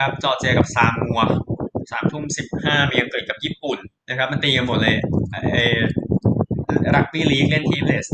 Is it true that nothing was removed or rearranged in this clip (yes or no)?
no